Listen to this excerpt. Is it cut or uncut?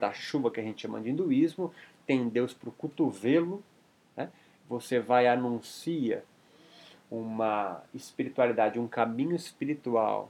uncut